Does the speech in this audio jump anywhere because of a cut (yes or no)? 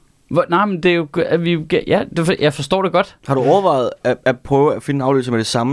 no